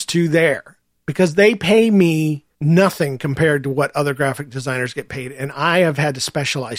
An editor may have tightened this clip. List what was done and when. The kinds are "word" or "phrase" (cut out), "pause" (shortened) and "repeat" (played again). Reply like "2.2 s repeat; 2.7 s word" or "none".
0.9 s pause; 2.5 s pause